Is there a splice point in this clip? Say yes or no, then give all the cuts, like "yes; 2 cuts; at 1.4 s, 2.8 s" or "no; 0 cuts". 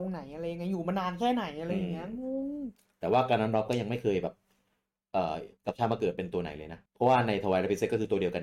yes; 2 cuts; at 5.6 s, 6.9 s